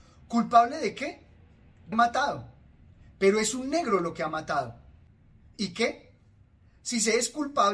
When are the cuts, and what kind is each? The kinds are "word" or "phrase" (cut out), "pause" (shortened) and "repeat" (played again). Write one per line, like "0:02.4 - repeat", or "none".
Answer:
0:01.9 - word